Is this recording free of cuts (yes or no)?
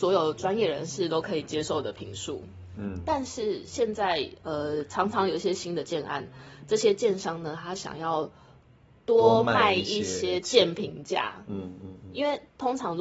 yes